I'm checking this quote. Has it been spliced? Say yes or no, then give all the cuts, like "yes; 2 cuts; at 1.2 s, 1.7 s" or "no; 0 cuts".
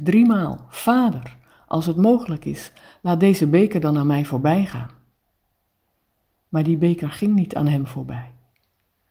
no; 0 cuts